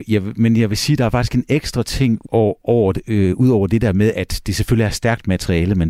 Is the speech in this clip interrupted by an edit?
yes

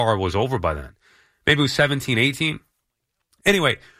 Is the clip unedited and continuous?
yes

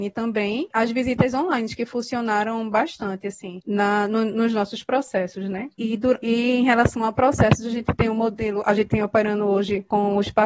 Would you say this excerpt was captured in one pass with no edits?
yes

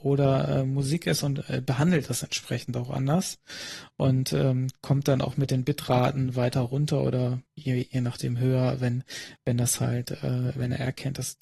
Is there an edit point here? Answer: yes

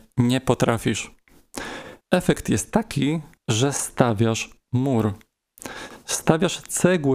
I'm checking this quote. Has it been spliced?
yes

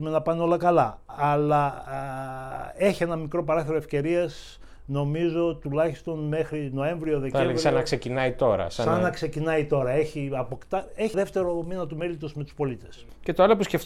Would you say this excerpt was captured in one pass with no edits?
no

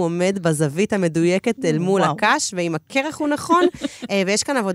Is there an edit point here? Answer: no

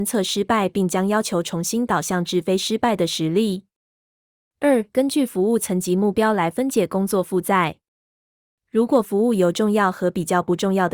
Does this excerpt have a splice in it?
no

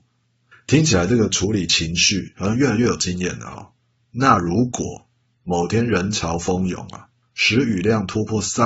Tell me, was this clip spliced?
no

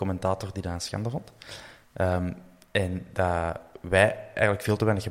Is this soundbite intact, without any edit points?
yes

